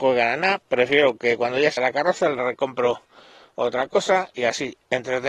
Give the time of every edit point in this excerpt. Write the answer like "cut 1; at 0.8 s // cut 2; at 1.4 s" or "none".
cut 1; at 1.8 s